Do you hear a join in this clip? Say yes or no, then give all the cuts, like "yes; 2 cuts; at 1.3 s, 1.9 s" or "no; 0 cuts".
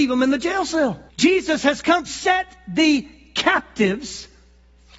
yes; 2 cuts; at 1.1 s, 2.1 s